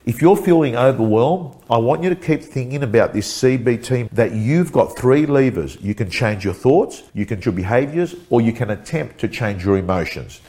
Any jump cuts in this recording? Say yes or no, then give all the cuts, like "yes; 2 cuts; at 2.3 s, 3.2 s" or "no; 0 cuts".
yes; 3 cuts; at 4.1 s, 7.1 s, 7.4 s